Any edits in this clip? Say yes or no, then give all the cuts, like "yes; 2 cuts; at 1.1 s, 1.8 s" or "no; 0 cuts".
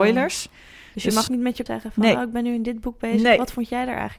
yes; 2 cuts; at 1.3 s, 1.7 s